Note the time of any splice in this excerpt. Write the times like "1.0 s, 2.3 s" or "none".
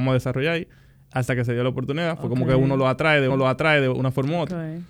3.3 s